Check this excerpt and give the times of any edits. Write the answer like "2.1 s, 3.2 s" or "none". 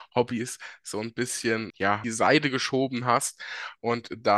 1.7 s, 2.0 s